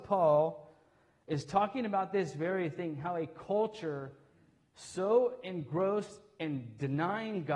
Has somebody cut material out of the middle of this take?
no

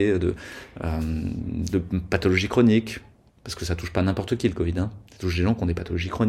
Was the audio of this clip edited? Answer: no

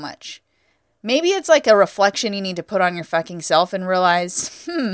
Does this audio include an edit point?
no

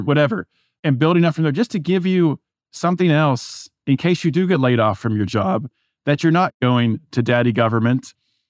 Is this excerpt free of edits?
yes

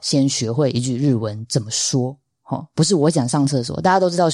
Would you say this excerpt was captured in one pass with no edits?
yes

